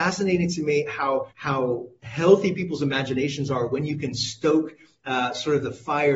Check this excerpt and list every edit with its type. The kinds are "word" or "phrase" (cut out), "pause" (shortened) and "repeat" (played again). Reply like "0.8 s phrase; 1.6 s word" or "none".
1.3 s pause